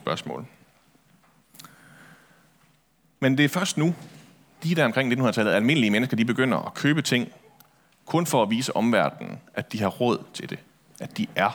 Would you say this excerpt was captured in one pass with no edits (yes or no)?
yes